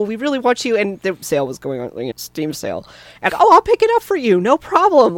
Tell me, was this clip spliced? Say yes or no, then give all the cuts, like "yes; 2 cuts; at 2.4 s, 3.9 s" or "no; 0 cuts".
yes; 3 cuts; at 1.2 s, 2.1 s, 3.3 s